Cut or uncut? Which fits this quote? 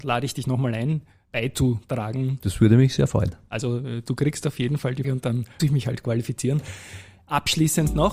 cut